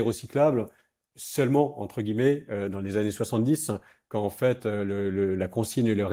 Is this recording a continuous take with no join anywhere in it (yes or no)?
yes